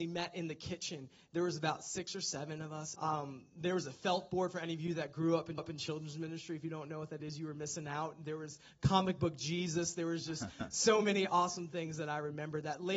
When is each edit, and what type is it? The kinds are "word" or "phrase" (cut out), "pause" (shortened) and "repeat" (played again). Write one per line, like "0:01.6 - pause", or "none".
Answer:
0:02.9 - word
0:05.6 - repeat